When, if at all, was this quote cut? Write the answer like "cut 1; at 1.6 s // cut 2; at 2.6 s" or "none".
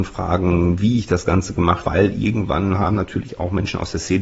cut 1; at 1.8 s